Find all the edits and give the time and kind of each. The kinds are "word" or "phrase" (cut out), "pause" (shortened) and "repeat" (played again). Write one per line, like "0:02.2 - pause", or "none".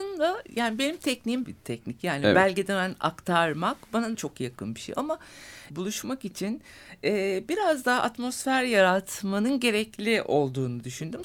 0:01.4 - phrase
0:04.1 - word
0:05.7 - phrase